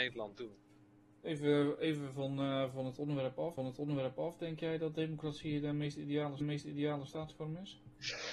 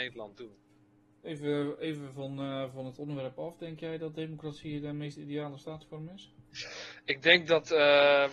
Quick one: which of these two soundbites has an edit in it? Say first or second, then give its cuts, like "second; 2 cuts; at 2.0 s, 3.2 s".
first; 2 cuts; at 3.6 s, 6.4 s